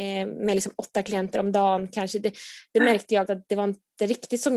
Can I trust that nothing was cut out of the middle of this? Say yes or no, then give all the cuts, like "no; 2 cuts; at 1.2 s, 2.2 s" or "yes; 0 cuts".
no; 1 cut; at 3.3 s